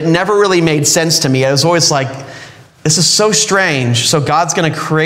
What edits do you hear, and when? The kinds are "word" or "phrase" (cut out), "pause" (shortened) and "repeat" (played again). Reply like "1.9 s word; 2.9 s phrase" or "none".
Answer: none